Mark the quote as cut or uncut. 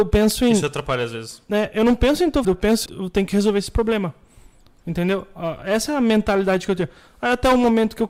cut